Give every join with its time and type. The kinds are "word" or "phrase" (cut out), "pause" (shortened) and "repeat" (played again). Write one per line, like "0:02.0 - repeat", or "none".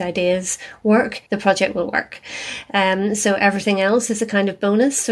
0:01.3 - pause